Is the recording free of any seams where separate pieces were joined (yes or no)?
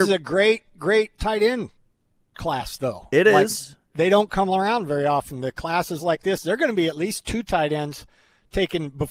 yes